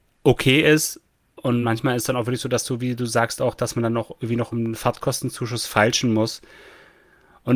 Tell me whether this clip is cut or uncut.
uncut